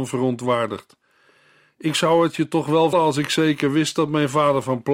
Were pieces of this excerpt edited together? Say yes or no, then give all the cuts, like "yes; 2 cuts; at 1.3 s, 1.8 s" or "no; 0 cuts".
yes; 1 cut; at 2.9 s